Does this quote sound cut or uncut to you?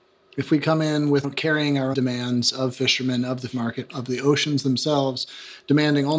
cut